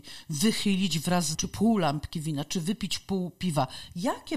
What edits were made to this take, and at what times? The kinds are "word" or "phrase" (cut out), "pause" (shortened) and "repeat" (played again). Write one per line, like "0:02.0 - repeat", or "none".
0:01.3 - phrase

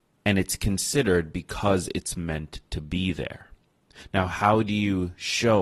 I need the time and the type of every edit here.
none

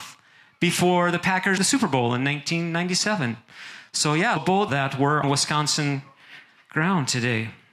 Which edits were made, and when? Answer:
0:01.6 - word
0:04.4 - word
0:04.7 - word
0:05.2 - word

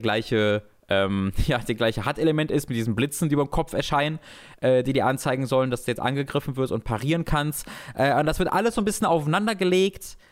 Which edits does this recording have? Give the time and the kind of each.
none

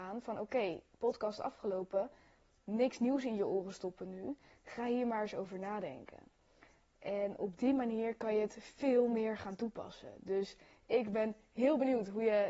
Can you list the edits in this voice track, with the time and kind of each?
none

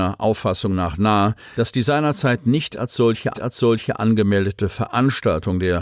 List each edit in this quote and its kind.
0:03.3 - repeat

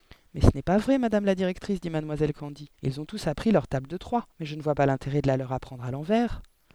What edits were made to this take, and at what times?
0:02.7 - pause
0:04.3 - pause

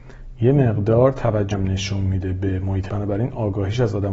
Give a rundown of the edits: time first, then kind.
0:01.5 - word
0:02.9 - word

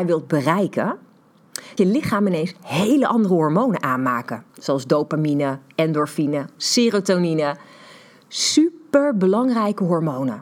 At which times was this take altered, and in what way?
0:01.8 - phrase
0:04.5 - pause
0:06.6 - word

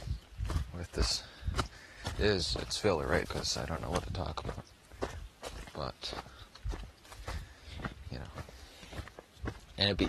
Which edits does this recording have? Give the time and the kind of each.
0:03.2 - word

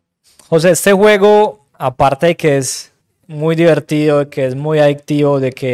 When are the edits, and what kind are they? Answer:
0:01.7 - pause
0:03.0 - pause

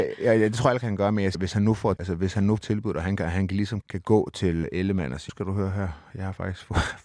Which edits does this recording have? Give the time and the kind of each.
0:01.3 - word
0:02.0 - word
0:02.6 - word
0:03.8 - word
0:04.6 - word
0:05.3 - word
0:06.1 - word

